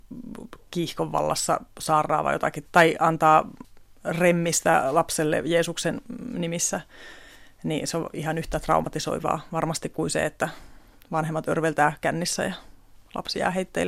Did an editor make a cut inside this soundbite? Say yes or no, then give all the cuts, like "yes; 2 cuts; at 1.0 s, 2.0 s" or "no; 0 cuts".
yes; 1 cut; at 2.6 s